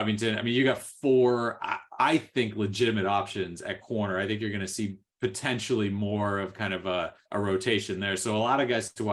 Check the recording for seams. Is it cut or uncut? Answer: cut